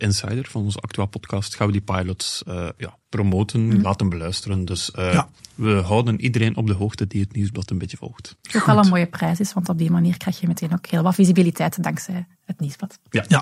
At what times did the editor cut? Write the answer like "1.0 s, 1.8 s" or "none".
5.4 s, 8.4 s